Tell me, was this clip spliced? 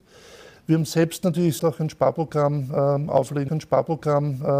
yes; 2 cuts; at 1.6 s, 3.5 s

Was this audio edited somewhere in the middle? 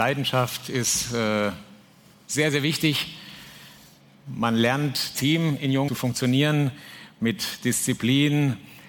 yes; 2 cuts; at 5.1 s, 5.9 s

